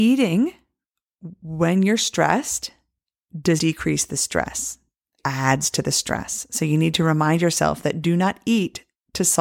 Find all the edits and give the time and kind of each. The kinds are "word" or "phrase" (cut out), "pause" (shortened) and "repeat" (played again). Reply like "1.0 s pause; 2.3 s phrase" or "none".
3.6 s word; 5.2 s word